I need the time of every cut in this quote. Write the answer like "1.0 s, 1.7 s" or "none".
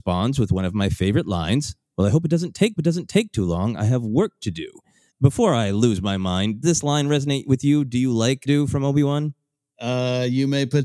2.8 s, 5.1 s, 6.6 s, 8.5 s